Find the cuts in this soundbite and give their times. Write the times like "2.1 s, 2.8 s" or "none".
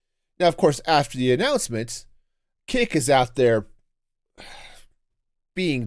none